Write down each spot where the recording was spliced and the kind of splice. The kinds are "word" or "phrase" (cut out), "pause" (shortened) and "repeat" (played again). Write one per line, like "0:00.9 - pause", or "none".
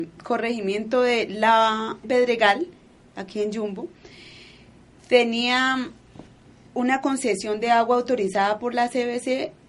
0:02.0 - phrase